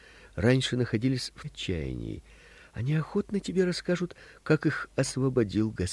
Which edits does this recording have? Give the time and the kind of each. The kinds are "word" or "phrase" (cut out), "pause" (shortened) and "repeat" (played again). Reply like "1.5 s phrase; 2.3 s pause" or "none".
1.4 s phrase